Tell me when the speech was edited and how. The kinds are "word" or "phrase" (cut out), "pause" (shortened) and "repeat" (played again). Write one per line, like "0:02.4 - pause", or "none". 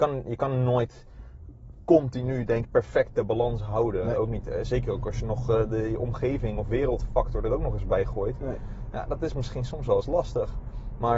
0:02.6 - word